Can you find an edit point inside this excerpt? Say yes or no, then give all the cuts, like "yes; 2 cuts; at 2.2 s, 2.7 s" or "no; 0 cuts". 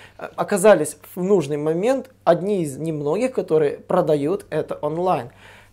no; 0 cuts